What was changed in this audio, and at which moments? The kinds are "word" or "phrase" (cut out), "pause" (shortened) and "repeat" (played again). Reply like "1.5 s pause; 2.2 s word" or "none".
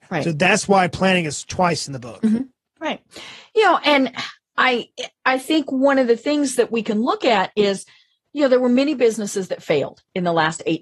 none